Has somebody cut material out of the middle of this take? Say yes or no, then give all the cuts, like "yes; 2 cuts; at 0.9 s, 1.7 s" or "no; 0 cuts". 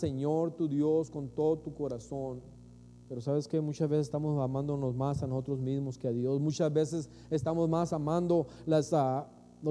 no; 0 cuts